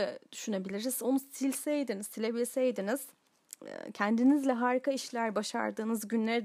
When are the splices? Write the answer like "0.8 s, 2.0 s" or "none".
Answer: none